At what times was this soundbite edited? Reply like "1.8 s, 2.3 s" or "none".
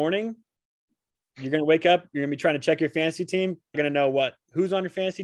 3.7 s